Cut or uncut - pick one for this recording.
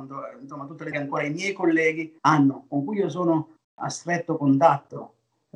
cut